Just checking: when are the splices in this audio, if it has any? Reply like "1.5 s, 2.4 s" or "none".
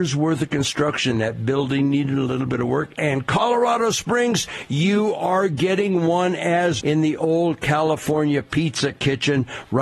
6.8 s